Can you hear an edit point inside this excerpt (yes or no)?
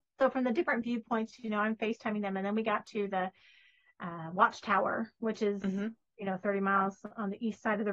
no